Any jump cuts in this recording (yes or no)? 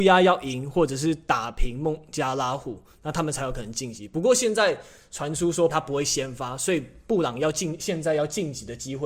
yes